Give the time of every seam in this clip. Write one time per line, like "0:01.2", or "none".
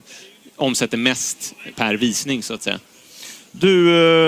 0:01.7

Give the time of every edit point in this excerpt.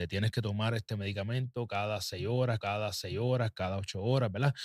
0:02.6

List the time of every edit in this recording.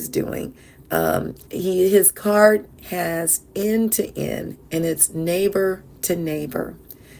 0:01.4
0:02.8

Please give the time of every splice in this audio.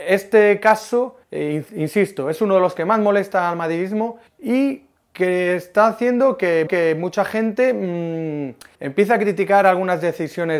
0:01.2
0:04.3
0:06.7
0:08.7

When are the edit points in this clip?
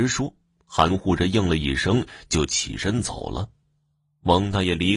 none

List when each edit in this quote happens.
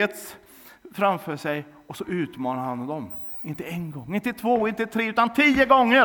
none

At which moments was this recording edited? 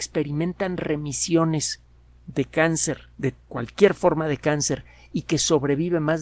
none

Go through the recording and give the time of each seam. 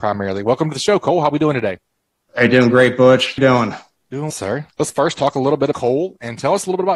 0:03.4
0:04.3
0:05.7

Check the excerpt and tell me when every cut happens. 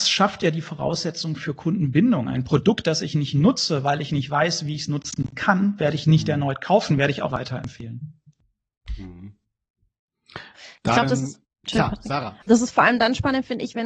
0:07.3
0:11.4
0:12.4

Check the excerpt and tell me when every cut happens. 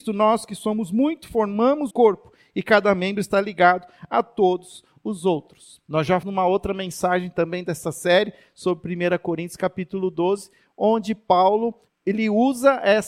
0:01.9
0:05.8
0:06.2
0:11.9

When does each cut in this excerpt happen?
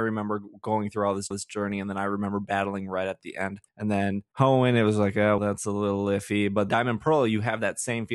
0:01.3
0:03.7
0:04.3
0:05.4
0:06.7

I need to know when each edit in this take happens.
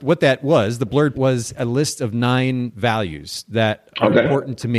0:01.1

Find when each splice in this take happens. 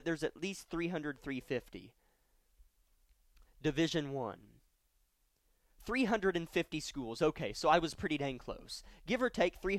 none

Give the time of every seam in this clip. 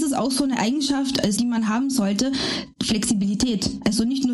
0:01.4
0:02.7

